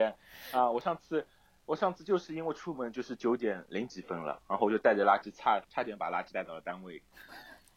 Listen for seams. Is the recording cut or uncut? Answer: uncut